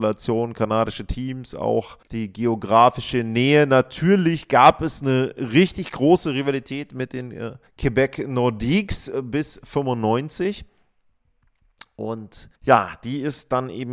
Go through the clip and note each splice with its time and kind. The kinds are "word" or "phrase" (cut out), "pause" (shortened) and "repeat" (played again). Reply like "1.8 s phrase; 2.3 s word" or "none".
2.0 s pause; 7.7 s pause; 12.6 s pause